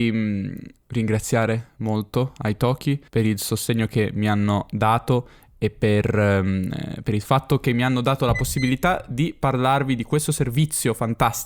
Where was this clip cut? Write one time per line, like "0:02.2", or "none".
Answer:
0:03.1